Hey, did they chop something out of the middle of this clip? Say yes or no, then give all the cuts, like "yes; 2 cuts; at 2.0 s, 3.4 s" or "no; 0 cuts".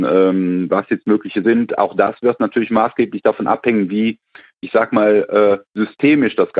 yes; 1 cut; at 1.4 s